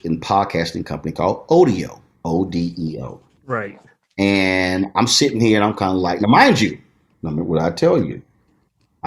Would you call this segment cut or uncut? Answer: uncut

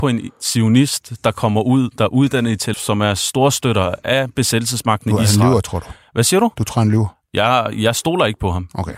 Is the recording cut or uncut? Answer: cut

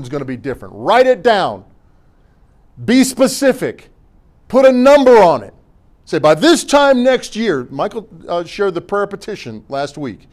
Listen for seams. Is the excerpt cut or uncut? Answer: uncut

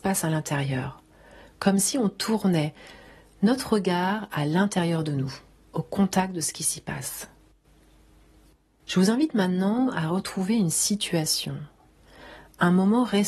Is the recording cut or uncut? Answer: uncut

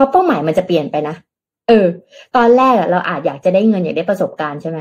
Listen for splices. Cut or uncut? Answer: uncut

